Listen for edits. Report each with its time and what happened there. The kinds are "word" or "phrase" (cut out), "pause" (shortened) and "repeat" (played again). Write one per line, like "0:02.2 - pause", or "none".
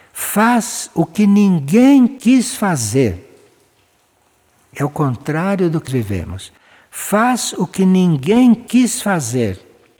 0:05.9 - word